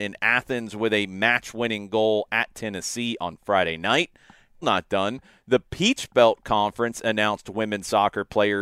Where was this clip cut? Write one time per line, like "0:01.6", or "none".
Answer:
0:04.6

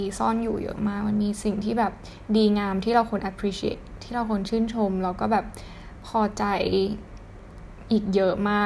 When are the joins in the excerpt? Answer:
0:03.7

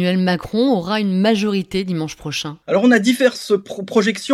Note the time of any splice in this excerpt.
0:02.6

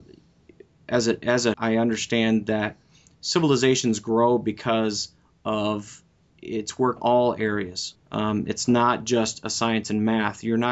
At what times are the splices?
0:01.5
0:06.3
0:07.0
0:07.9

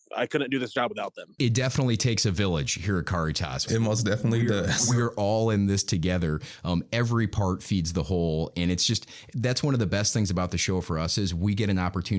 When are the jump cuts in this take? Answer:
none

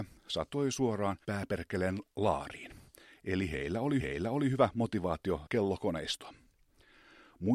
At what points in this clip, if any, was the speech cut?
0:01.2
0:04.0
0:05.5

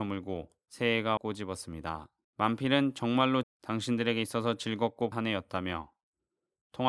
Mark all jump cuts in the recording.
0:01.2
0:02.2
0:03.4
0:05.1

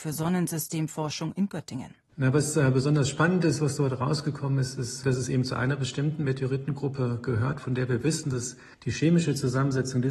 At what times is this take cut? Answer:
0:02.0
0:08.7

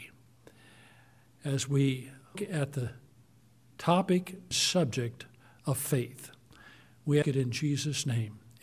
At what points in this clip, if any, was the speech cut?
0:02.3
0:04.5
0:07.2

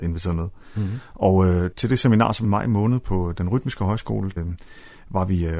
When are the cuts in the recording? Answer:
0:01.7
0:02.4
0:04.4

